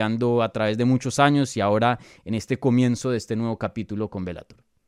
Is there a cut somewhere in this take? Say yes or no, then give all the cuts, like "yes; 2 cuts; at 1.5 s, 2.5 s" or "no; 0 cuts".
no; 0 cuts